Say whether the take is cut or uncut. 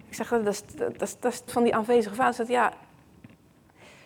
cut